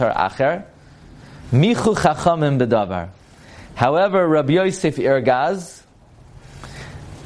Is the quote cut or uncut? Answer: uncut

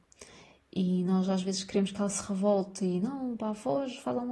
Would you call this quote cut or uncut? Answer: uncut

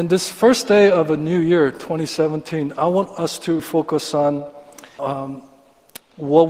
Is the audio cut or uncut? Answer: cut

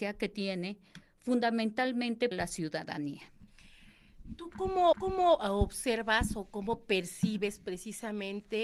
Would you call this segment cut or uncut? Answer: cut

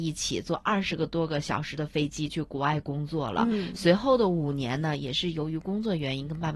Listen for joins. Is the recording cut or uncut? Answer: uncut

